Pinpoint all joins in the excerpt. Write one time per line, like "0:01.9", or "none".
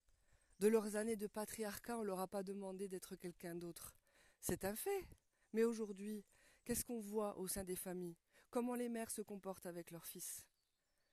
none